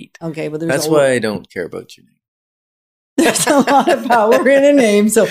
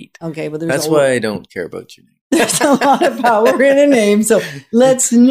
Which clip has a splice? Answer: second; 1 cut; at 2.2 s

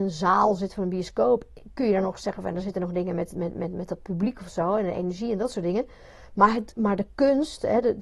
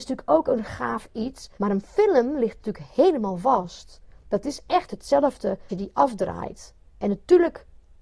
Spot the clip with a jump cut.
second; 4 cuts; at 1.5 s, 4.9 s, 5.7 s, 6.8 s

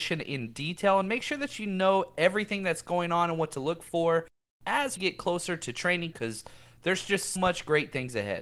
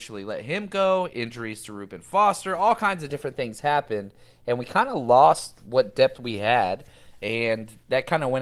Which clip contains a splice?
first; 3 cuts; at 5.0 s, 6.1 s, 7.4 s

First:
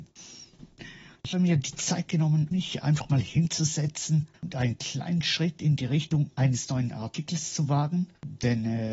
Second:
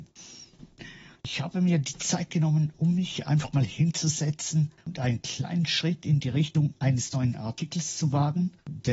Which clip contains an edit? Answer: first; 2 cuts; at 1.3 s, 2.5 s

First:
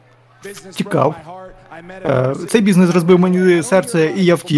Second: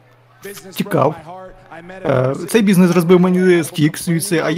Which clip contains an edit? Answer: second; 1 cut; at 3.6 s

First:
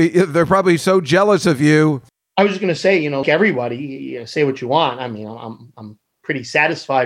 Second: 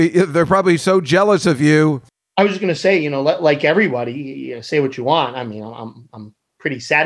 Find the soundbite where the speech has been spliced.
first; 1 cut; at 3.2 s

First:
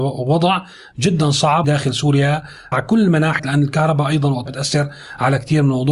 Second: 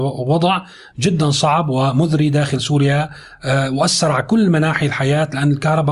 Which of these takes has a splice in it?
first; 4 cuts; at 1.6 s, 2.7 s, 3.4 s, 4.5 s

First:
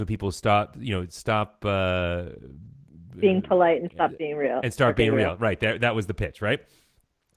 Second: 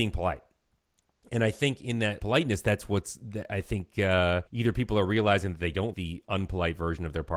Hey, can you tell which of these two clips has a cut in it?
second; 3 cuts; at 2.2 s, 4.5 s, 5.9 s

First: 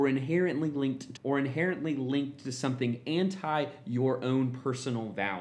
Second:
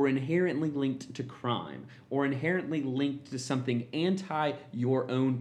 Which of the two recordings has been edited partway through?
first; 1 cut; at 1.2 s

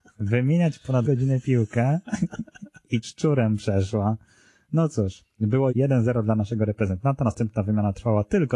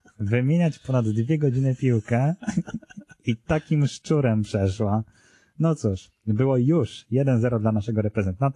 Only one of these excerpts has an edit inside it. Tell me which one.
first; 3 cuts; at 1.0 s, 3.0 s, 5.7 s

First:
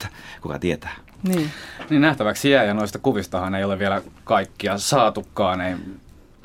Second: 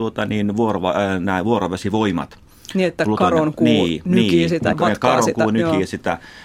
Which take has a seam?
second; 1 cut; at 4.7 s

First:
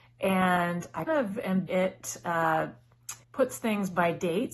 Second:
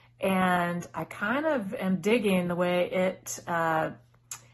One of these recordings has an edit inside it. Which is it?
first; 3 cuts; at 1.1 s, 1.7 s, 3.2 s

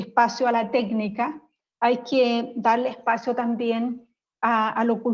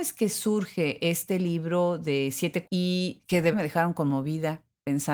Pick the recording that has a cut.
second; 2 cuts; at 2.7 s, 3.5 s

